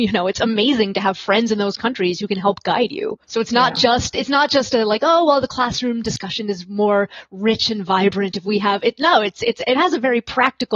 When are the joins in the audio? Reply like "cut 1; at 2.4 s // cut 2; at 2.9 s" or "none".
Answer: cut 1; at 3.2 s